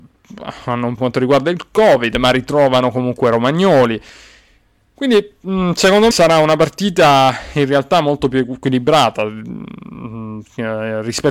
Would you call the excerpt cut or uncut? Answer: cut